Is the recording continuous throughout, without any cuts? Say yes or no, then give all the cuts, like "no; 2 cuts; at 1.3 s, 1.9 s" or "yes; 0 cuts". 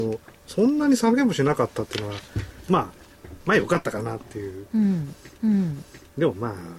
no; 1 cut; at 5.4 s